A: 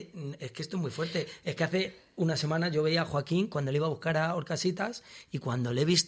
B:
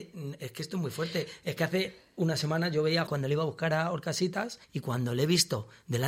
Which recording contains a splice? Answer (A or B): B